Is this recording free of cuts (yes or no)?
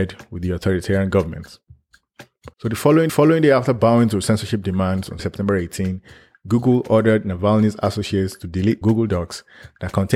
no